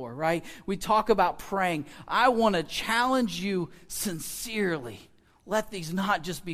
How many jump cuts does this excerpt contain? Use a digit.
0